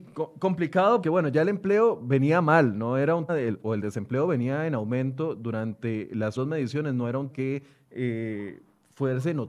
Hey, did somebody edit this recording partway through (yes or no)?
yes